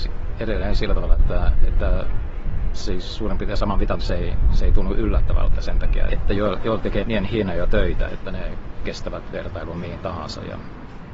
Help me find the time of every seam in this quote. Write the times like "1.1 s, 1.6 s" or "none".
3.9 s, 6.1 s, 7.0 s, 8.1 s